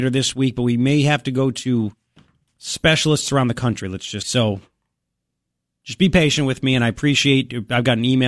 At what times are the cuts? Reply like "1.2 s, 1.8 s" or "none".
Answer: 2.5 s, 4.2 s